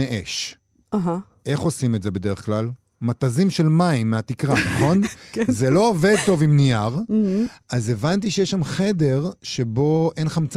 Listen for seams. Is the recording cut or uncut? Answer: uncut